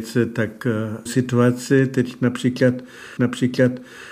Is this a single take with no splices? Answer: no; 2 cuts; at 1.1 s, 3.2 s

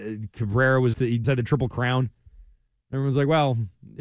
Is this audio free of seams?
no; 2 cuts; at 0.9 s, 1.2 s

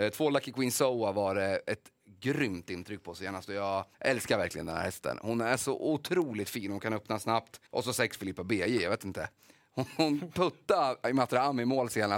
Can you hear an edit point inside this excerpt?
yes; 2 cuts; at 3.9 s, 7.7 s

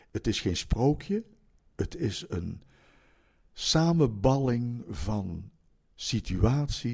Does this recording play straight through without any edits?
yes; 0 cuts

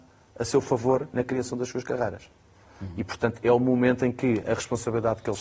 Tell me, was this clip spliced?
no; 0 cuts

